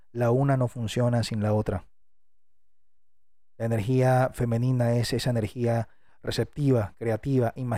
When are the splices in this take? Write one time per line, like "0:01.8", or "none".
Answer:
none